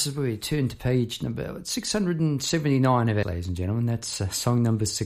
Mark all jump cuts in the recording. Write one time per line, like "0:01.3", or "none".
0:03.2